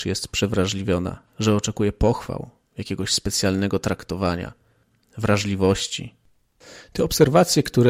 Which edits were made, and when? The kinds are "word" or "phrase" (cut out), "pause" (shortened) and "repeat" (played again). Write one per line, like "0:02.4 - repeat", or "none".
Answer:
none